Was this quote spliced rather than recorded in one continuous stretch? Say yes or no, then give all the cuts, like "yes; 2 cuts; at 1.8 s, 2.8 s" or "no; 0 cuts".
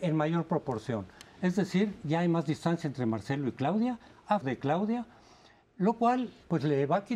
yes; 1 cut; at 4.4 s